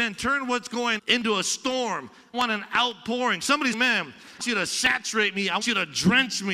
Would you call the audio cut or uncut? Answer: cut